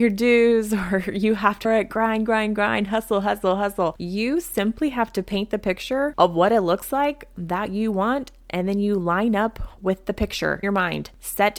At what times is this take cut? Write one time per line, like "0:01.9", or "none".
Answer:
0:01.6
0:10.6